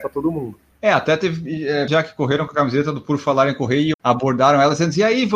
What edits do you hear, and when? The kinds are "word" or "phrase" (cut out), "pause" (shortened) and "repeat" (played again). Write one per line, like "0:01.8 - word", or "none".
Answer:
0:01.9 - word
0:03.9 - phrase